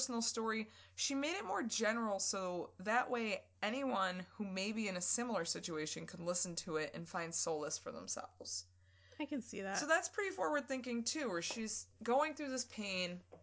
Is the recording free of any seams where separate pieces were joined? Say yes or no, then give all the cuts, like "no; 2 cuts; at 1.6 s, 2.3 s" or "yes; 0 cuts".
yes; 0 cuts